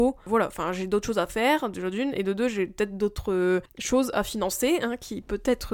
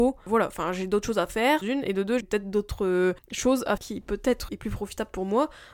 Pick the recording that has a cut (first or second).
second